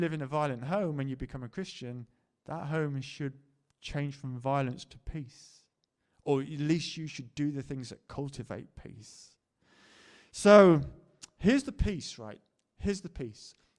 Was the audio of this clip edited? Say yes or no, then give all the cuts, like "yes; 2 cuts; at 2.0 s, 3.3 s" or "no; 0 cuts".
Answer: no; 0 cuts